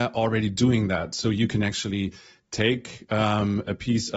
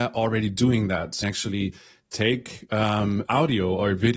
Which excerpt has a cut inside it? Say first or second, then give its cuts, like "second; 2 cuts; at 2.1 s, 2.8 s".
second; 2 cuts; at 1.2 s, 3.2 s